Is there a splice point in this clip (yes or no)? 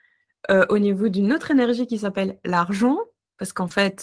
no